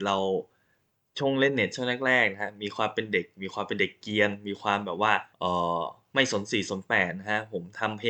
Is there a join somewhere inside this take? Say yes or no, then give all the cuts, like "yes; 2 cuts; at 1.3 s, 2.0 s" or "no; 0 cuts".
yes; 1 cut; at 5.3 s